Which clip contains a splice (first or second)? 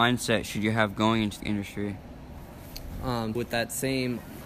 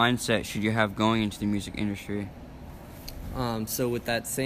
first